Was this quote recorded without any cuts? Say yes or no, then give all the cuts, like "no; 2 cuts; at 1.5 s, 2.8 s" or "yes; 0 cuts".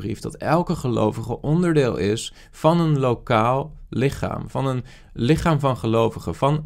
yes; 0 cuts